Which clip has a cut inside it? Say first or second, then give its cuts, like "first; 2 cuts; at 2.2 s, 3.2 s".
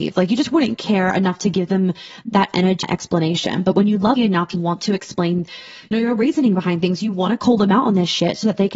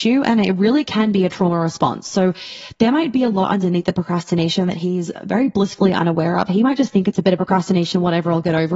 first; 4 cuts; at 2.8 s, 4.2 s, 4.5 s, 5.9 s